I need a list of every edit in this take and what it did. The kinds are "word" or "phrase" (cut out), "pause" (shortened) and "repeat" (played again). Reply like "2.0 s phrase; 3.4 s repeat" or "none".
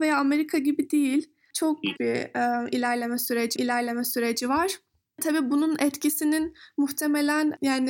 2.0 s word; 3.6 s repeat